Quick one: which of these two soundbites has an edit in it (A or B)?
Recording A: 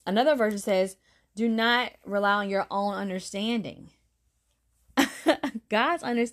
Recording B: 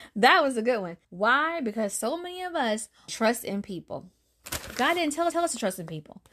B